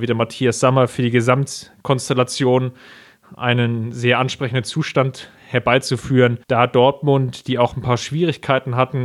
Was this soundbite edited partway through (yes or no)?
yes